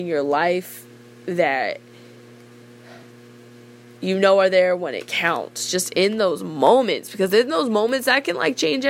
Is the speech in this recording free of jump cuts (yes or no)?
yes